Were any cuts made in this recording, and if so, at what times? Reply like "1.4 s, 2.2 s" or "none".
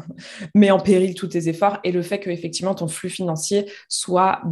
none